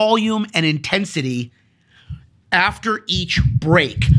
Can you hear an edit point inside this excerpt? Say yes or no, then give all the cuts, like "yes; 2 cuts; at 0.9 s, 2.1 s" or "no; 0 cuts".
no; 0 cuts